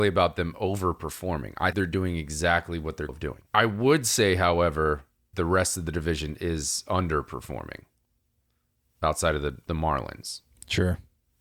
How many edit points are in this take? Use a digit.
4